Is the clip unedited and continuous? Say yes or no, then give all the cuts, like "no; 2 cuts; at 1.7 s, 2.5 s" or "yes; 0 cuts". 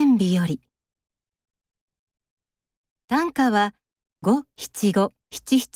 yes; 0 cuts